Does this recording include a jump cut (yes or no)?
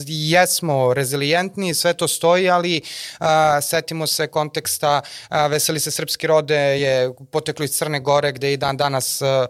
no